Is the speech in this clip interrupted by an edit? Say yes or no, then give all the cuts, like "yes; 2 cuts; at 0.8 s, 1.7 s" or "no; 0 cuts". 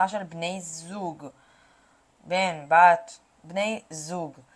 yes; 1 cut; at 3.3 s